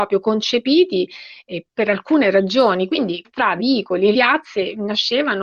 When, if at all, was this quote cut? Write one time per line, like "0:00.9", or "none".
0:01.7
0:03.2
0:03.6
0:04.1

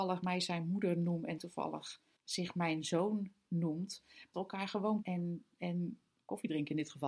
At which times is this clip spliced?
0:01.4
0:02.2
0:04.3
0:05.0

